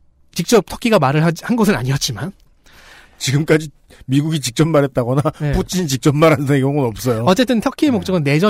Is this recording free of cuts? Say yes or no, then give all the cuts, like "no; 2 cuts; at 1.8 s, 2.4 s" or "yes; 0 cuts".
yes; 0 cuts